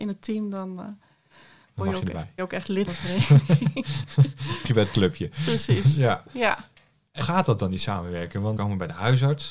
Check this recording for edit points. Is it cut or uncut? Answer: cut